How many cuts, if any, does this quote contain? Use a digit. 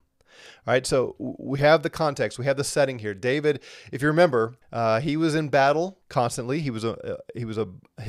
2